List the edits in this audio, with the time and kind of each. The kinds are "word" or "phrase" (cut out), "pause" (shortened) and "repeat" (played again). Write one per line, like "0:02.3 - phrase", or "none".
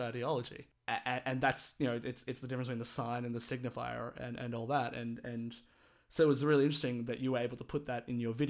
none